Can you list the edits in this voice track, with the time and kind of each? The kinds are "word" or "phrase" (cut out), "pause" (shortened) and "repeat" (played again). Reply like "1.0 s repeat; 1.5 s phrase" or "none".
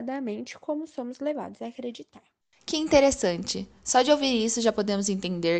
2.4 s pause